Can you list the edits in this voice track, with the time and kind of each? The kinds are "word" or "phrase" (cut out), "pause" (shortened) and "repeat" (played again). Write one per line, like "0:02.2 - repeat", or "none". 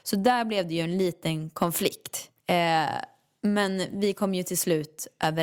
0:02.4 - pause